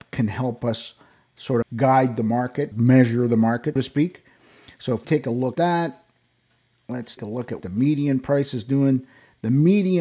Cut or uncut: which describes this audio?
cut